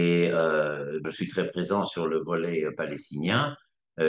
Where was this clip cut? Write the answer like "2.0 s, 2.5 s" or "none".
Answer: 1.0 s